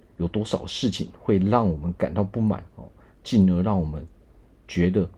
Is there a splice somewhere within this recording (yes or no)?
yes